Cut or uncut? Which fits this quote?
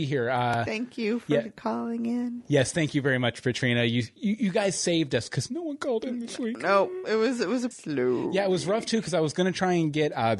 cut